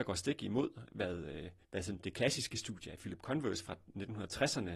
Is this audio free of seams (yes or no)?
no